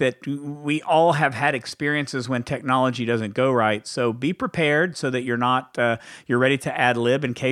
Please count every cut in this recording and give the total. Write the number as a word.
zero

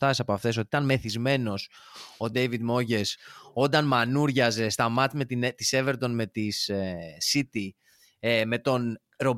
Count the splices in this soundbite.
zero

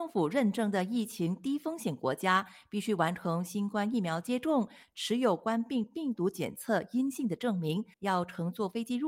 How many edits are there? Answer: one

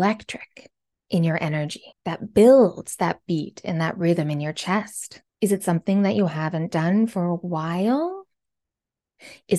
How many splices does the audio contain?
two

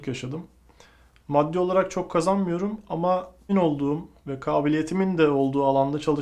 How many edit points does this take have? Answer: one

